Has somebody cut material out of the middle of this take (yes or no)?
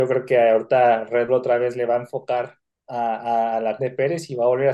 yes